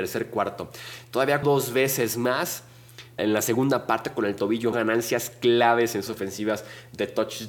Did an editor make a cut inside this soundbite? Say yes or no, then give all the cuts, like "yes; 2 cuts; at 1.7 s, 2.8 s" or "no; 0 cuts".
yes; 4 cuts; at 1.4 s, 3.2 s, 4.7 s, 6.1 s